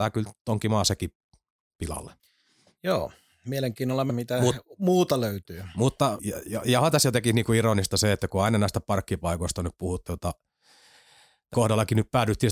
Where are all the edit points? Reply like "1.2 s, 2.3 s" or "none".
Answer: 4.1 s, 6.2 s, 10.0 s, 11.5 s